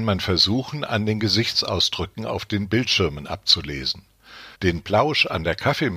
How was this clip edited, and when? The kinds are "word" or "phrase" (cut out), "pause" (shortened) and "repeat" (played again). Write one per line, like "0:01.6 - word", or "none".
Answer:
0:04.5 - pause